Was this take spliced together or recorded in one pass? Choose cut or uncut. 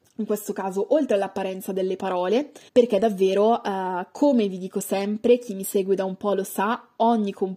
cut